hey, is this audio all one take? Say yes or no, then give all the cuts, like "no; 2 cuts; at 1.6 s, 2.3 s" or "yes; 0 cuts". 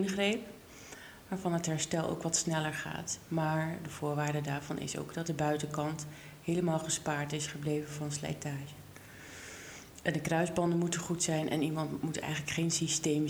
yes; 0 cuts